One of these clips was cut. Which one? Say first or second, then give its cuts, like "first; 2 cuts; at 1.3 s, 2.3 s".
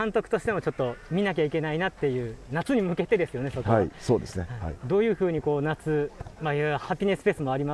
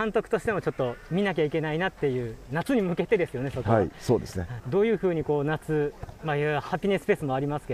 second; 1 cut; at 4.6 s